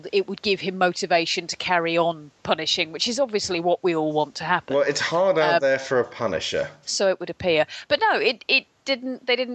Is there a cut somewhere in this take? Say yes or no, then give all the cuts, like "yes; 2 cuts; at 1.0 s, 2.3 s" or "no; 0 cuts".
no; 0 cuts